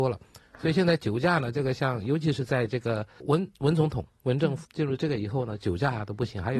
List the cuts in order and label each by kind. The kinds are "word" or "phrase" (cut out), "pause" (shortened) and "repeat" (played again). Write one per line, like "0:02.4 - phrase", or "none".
0:03.2 - word
0:04.6 - word